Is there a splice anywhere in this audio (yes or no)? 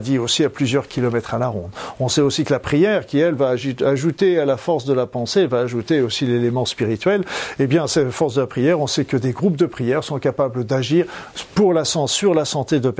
no